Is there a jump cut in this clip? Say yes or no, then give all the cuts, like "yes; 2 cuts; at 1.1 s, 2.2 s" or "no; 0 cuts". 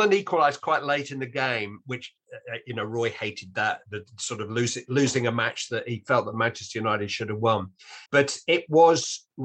yes; 1 cut; at 8.1 s